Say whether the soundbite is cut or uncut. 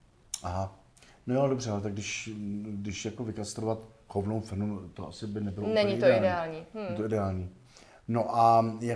uncut